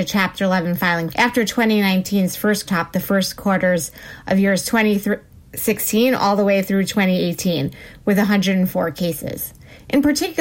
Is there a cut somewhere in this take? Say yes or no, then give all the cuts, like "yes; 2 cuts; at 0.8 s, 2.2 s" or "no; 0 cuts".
yes; 2 cuts; at 1.1 s, 2.7 s